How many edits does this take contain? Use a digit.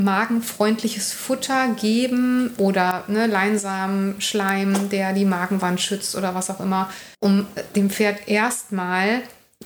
1